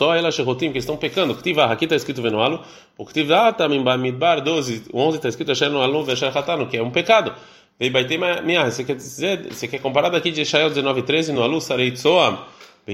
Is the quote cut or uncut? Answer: uncut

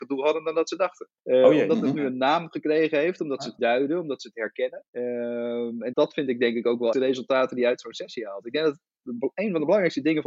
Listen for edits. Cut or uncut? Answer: cut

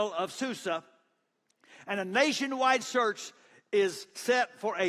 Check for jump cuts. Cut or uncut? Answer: uncut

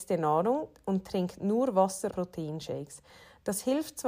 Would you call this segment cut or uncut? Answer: cut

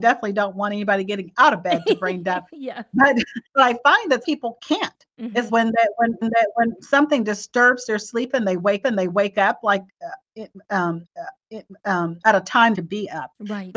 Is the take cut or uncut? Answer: cut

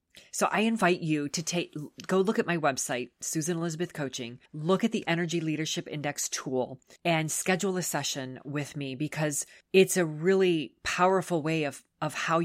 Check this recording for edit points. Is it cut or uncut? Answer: cut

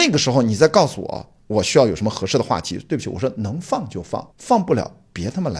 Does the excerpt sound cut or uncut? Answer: cut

